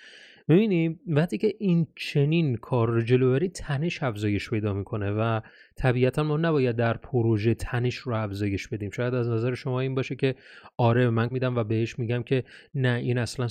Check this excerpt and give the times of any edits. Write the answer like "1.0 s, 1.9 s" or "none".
11.3 s